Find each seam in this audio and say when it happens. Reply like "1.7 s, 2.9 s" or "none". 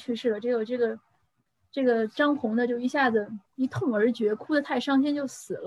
3.5 s